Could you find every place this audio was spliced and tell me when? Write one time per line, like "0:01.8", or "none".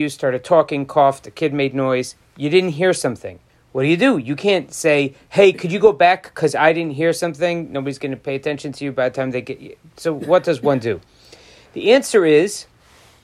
0:03.5